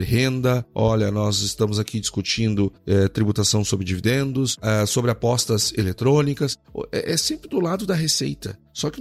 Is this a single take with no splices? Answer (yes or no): yes